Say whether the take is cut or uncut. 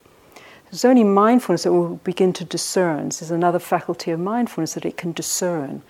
uncut